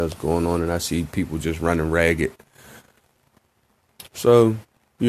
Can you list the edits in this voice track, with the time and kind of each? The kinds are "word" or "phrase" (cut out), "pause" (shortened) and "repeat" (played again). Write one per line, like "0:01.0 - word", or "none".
none